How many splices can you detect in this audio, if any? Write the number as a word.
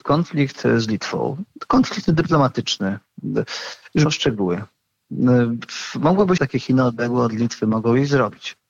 two